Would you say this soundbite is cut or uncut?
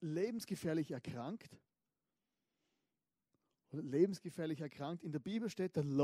uncut